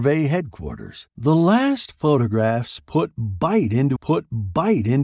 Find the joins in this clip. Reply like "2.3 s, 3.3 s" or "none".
1.1 s, 4.0 s